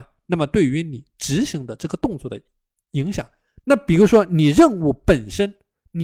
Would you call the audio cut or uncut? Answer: uncut